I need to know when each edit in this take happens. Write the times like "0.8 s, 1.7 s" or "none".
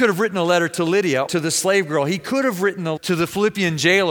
1.3 s, 3.0 s